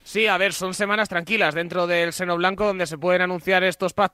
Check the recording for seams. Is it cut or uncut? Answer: uncut